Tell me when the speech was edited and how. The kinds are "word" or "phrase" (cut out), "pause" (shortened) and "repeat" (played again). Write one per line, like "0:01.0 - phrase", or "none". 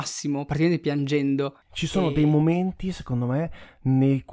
0:01.6 - pause